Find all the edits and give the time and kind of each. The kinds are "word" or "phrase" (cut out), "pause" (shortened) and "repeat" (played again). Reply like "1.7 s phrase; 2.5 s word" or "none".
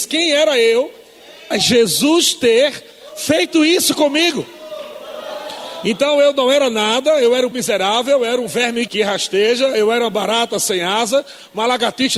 1.5 s word; 7.5 s word; 8.9 s word